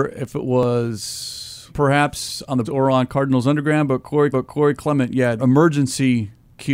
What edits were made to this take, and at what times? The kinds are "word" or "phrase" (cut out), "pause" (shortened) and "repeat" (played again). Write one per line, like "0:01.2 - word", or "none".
0:01.7 - phrase
0:02.6 - word
0:04.3 - repeat
0:05.4 - word

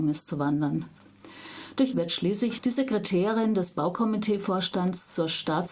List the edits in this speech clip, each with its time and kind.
0:01.9 - word
0:02.6 - word

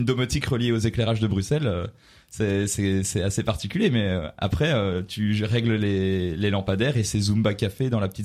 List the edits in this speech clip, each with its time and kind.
none

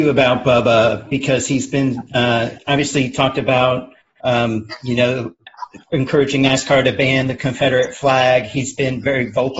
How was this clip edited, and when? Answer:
none

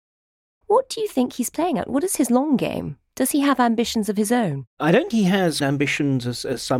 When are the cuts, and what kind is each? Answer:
0:04.7 - pause
0:05.1 - word
0:05.6 - word

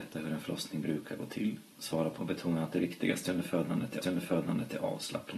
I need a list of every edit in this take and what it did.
0:01.7 - pause
0:02.2 - phrase
0:04.0 - repeat

